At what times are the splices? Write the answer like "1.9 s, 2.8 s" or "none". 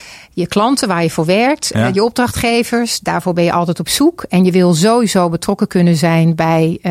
none